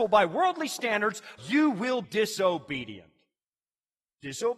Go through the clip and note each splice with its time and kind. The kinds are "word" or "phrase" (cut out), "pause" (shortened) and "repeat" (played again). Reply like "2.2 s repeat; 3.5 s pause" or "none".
1.4 s word; 2.0 s word